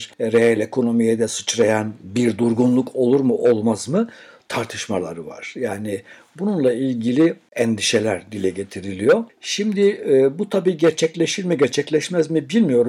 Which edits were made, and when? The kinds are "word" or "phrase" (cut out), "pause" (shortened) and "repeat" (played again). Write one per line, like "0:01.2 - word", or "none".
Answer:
none